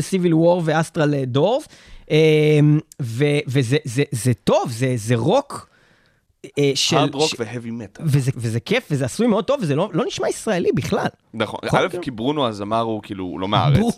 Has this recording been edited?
yes; 1 cut; at 8.3 s

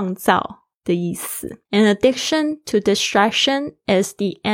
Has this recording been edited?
yes; 1 cut; at 1.6 s

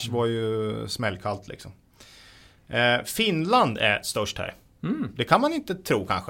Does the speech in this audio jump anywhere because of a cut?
no; 0 cuts

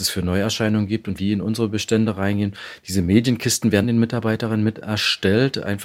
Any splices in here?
yes; 2 cuts; at 1.2 s, 3.8 s

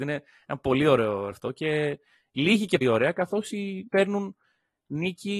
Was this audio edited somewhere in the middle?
yes; 3 cuts; at 1.3 s, 2.8 s, 3.9 s

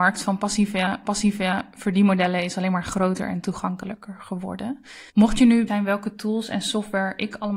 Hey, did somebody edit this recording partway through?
yes; 3 cuts; at 1.0 s, 5.1 s, 5.7 s

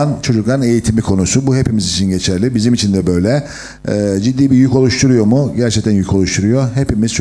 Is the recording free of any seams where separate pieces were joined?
yes; 0 cuts

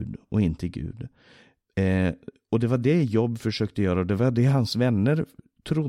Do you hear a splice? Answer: no; 0 cuts

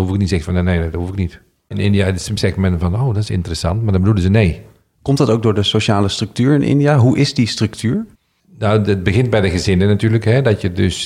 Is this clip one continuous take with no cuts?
yes; 0 cuts

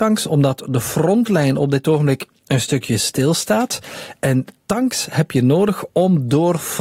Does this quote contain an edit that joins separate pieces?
no; 0 cuts

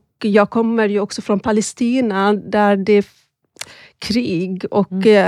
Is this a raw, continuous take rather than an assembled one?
yes; 0 cuts

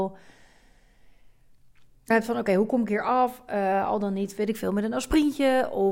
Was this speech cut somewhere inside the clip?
yes; 1 cut; at 2.1 s

